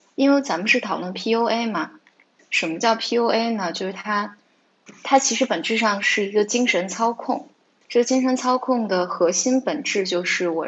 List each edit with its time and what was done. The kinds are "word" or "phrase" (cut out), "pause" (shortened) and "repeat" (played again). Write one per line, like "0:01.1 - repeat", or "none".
none

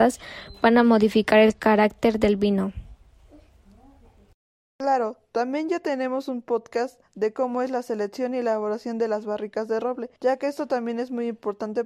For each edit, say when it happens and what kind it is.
0:10.2 - pause

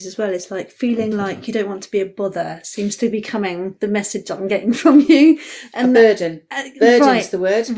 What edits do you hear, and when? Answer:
none

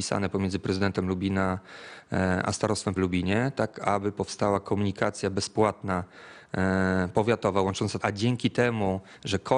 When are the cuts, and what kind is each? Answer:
0:03.0 - word
0:08.0 - phrase

